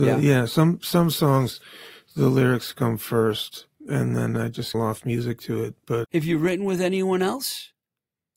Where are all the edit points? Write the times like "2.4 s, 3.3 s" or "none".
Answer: 3.7 s, 4.7 s, 6.0 s